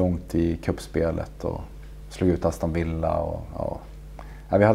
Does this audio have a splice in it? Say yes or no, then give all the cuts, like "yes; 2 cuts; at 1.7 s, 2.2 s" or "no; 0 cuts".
no; 0 cuts